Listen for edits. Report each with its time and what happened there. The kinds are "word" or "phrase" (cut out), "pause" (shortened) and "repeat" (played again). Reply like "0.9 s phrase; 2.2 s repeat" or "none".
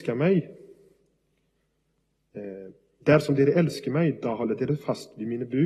none